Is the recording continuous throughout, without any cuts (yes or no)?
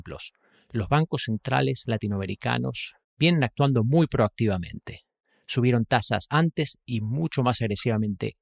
yes